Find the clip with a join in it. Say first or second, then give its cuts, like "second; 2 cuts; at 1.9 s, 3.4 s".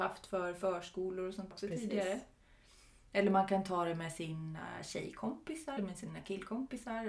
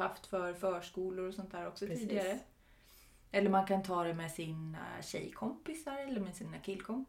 first; 2 cuts; at 1.5 s, 5.8 s